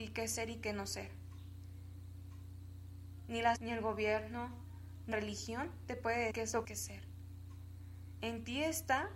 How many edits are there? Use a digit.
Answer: 4